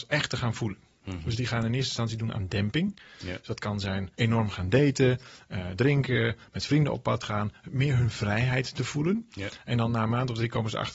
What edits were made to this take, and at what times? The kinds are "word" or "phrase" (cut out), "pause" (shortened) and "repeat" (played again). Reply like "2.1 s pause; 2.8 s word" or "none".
4.1 s pause